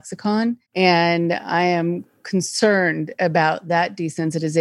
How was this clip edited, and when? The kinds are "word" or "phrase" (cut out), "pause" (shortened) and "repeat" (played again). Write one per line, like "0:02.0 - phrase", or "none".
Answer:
none